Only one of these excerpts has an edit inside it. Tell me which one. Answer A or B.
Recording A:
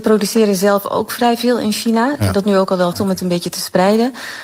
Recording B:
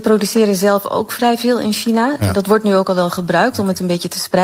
A